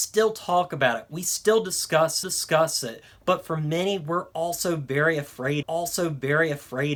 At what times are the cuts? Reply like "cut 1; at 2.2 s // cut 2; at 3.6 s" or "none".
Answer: cut 1; at 2.2 s // cut 2; at 5.6 s